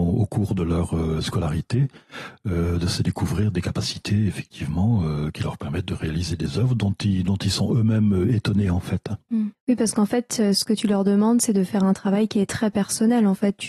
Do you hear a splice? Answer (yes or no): yes